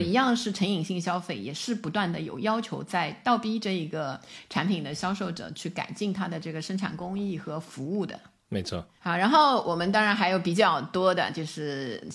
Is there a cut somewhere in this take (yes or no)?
no